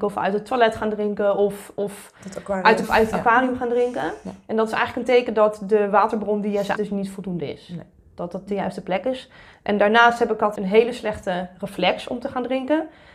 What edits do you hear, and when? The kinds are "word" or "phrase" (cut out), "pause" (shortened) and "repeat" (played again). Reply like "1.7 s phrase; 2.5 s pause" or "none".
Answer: 2.8 s word; 6.8 s word; 8.5 s word; 10.6 s word